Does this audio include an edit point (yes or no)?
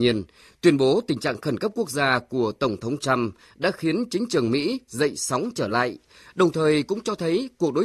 no